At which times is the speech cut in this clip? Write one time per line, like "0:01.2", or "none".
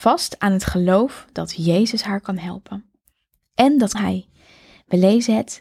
0:03.9

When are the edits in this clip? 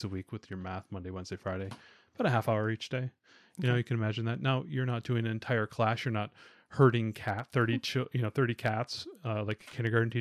none

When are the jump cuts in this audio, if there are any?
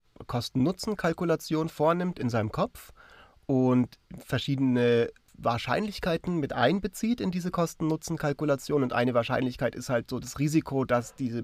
none

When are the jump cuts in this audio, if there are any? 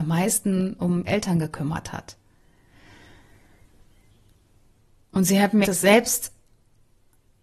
0:01.1
0:05.6

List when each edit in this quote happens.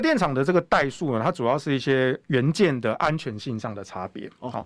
none

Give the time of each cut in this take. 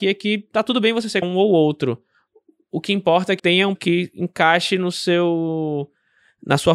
0:01.2
0:03.4
0:03.8

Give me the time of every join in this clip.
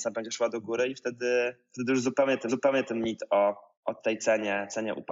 0:02.5

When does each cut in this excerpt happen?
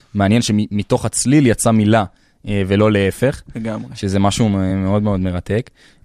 none

